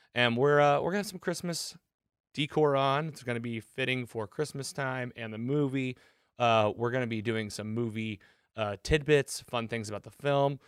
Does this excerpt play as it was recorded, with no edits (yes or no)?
yes